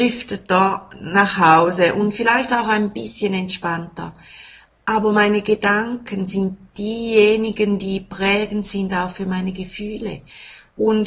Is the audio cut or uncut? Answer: uncut